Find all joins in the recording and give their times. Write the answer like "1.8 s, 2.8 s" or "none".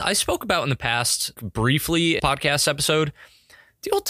1.4 s, 2.2 s